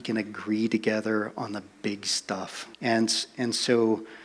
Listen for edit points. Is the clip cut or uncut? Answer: cut